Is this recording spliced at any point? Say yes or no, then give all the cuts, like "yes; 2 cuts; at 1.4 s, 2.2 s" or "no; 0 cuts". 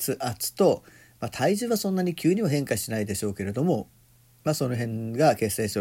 no; 0 cuts